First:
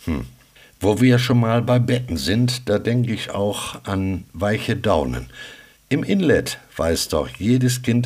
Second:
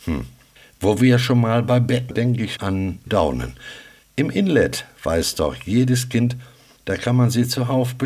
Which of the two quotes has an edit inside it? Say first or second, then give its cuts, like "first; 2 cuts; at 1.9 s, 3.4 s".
second; 3 cuts; at 2.1 s, 2.6 s, 3.1 s